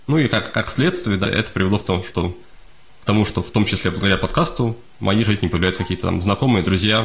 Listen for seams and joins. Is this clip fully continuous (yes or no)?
no